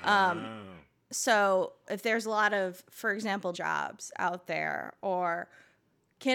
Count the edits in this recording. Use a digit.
1